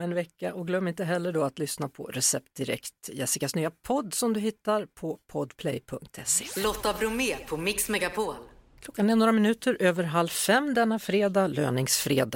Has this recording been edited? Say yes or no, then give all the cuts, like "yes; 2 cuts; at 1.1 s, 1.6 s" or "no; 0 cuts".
no; 0 cuts